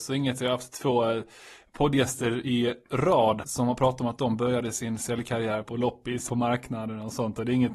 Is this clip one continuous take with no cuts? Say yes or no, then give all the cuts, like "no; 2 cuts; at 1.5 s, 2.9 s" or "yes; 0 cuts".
no; 3 cuts; at 3.4 s, 5.6 s, 6.3 s